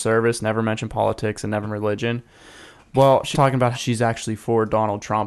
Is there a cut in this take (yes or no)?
yes